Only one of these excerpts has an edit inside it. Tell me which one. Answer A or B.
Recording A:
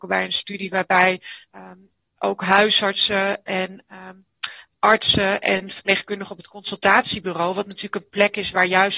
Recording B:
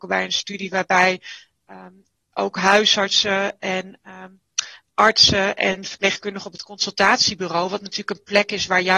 A